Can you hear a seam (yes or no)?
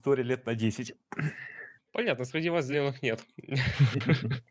yes